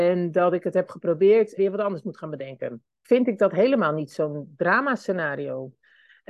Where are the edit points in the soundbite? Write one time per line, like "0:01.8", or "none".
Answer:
0:01.6
0:03.0